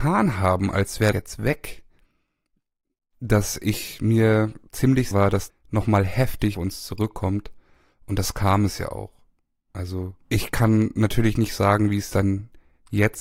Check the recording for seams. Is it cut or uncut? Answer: cut